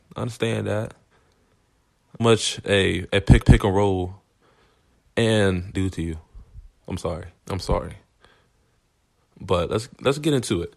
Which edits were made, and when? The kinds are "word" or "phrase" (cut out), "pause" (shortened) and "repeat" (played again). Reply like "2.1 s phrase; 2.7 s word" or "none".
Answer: 2.2 s phrase; 3.4 s repeat; 5.7 s phrase; 7.4 s pause